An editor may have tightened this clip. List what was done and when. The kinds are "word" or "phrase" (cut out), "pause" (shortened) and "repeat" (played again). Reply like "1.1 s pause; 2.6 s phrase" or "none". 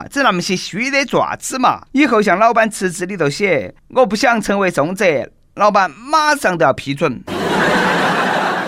1.9 s pause; 3.8 s pause